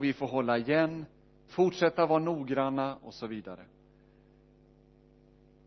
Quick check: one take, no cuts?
no; 1 cut; at 1.5 s

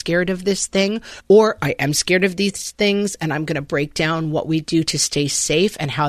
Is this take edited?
no; 0 cuts

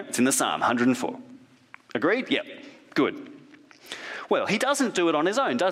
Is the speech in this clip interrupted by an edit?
no; 0 cuts

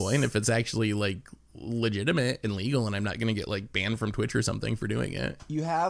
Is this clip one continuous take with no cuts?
yes; 0 cuts

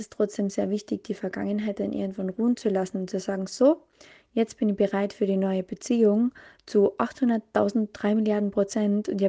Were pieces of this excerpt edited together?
no; 0 cuts

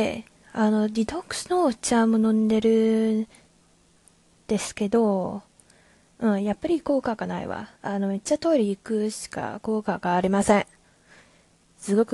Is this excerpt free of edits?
no; 1 cut; at 7.8 s

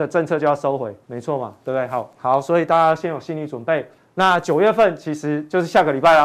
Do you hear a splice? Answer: yes; 2 cuts; at 1.0 s, 4.0 s

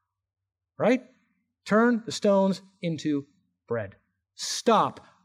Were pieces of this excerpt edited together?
no; 0 cuts

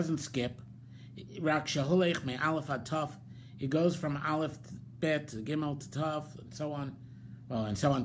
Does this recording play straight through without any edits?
yes; 0 cuts

